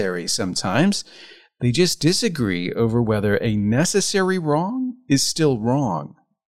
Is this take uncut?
yes; 0 cuts

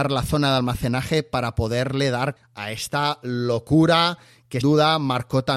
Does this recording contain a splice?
yes; 2 cuts; at 2.4 s, 4.6 s

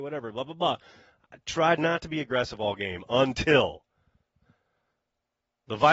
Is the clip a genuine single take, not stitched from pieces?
yes; 0 cuts

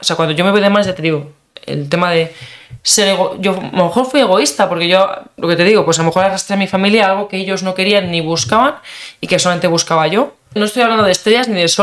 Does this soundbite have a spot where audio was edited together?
yes; 1 cut; at 10.6 s

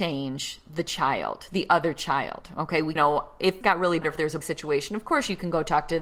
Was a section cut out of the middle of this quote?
yes; 4 cuts; at 3.0 s, 3.6 s, 4.0 s, 4.4 s

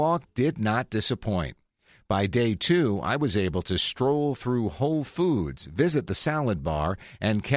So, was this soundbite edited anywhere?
no; 0 cuts

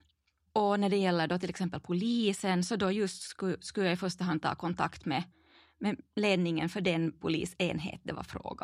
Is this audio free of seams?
yes; 0 cuts

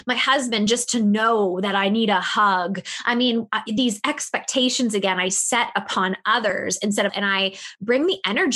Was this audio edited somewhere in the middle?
yes; 1 cut; at 7.1 s

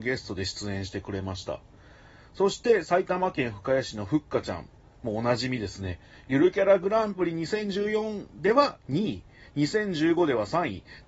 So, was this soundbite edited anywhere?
no; 0 cuts

